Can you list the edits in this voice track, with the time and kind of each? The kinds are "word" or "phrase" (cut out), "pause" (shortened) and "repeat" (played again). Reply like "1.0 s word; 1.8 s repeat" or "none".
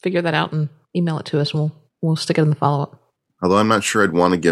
none

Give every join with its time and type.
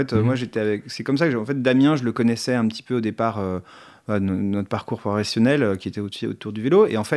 none

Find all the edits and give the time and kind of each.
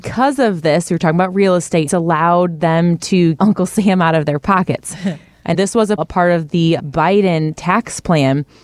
1.9 s phrase; 3.4 s word; 5.5 s word; 6.0 s word; 6.8 s word

